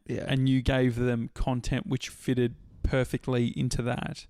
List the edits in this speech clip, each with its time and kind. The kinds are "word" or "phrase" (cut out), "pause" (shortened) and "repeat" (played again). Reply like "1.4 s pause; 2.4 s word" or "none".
2.1 s word